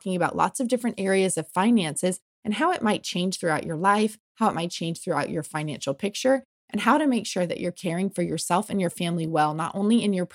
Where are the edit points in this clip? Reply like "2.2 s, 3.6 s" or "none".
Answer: none